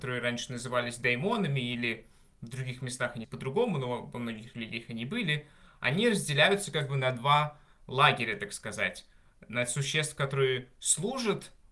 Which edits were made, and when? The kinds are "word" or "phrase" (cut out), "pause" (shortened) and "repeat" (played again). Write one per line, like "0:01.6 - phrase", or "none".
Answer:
0:03.2 - word